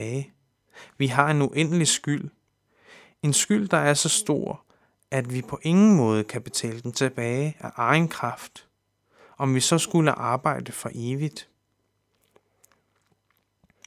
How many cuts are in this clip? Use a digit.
0